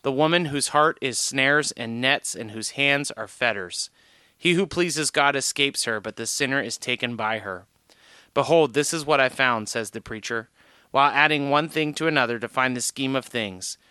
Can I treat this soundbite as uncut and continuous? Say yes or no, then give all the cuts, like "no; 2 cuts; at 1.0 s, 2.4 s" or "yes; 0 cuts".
yes; 0 cuts